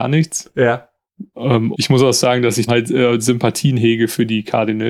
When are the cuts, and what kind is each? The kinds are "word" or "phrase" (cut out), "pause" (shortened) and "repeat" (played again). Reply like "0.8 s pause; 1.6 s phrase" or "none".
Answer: 1.7 s word; 2.7 s word

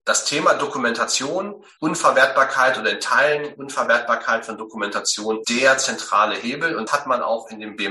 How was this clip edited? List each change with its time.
1.8 s word; 5.4 s word; 6.9 s word

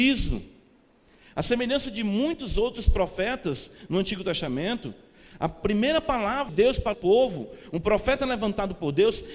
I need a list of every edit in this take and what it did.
6.5 s word; 6.9 s phrase

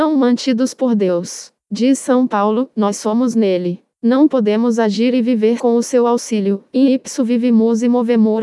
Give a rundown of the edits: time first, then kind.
5.6 s word

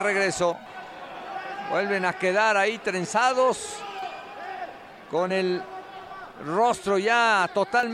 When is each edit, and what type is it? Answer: none

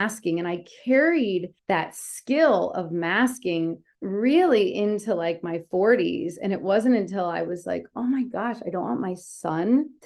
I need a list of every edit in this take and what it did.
1.6 s pause

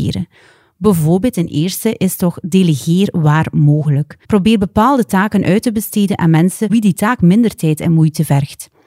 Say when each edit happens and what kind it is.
4.2 s pause; 6.7 s word

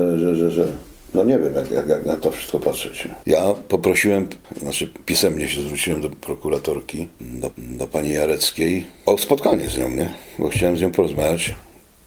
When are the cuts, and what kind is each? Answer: 7.5 s repeat; 9.0 s pause

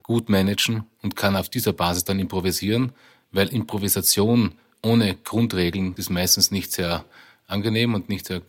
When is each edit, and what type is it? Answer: 6.0 s word

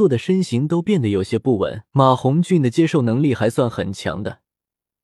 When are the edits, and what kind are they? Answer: 1.9 s pause

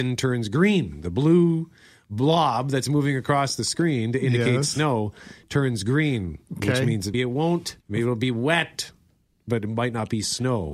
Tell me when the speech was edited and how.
7.1 s word; 7.8 s pause

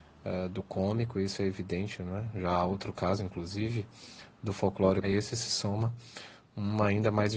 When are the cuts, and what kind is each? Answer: 5.0 s phrase

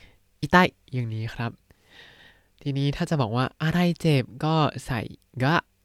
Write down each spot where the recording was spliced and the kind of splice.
none

